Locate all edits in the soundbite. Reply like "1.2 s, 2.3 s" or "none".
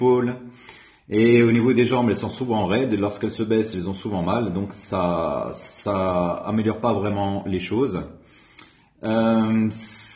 none